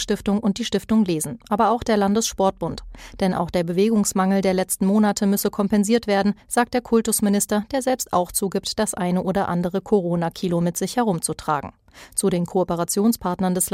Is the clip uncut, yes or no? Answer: yes